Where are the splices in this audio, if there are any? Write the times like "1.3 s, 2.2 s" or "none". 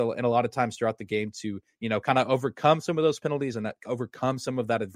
none

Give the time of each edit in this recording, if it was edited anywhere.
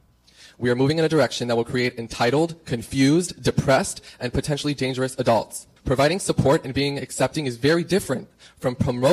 5.8 s

